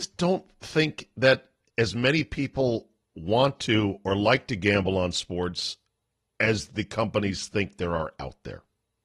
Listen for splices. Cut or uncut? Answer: uncut